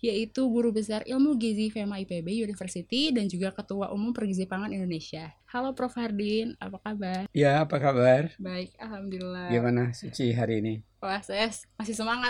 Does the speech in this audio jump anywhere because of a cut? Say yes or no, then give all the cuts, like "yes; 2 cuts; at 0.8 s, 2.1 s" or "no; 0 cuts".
yes; 1 cut; at 5.4 s